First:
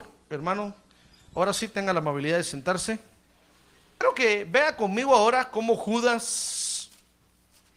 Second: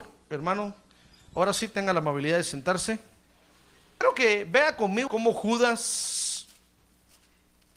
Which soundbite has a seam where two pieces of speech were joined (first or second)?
second